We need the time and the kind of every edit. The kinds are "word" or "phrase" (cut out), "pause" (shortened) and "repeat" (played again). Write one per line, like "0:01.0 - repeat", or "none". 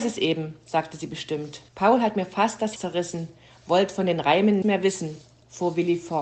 0:01.7 - pause
0:02.8 - word
0:04.6 - word